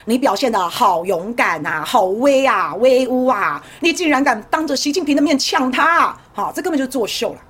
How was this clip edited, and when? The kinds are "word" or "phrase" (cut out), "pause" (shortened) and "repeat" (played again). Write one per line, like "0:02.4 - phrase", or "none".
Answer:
0:06.3 - pause

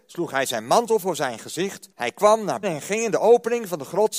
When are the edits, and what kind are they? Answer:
0:01.9 - pause
0:02.6 - word

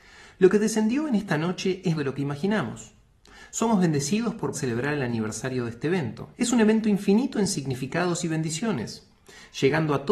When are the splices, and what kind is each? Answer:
0:01.9 - phrase
0:04.5 - word
0:06.3 - pause

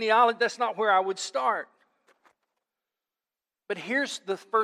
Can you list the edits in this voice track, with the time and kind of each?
none

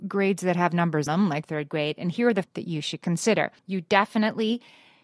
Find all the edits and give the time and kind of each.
0:01.1 - word
0:01.4 - phrase
0:02.4 - word
0:03.6 - pause

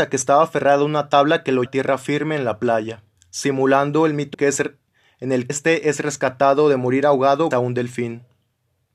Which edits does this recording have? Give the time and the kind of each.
0:01.7 - word
0:03.2 - pause
0:04.3 - phrase
0:05.5 - word
0:07.5 - word

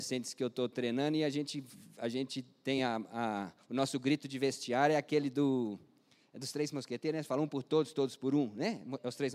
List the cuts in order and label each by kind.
none

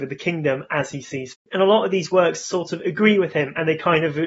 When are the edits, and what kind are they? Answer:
0:01.3 - word

